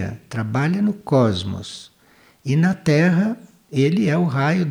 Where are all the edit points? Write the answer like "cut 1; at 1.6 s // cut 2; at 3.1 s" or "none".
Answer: none